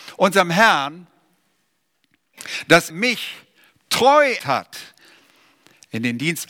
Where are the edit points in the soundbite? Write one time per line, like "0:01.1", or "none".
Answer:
0:02.9
0:04.4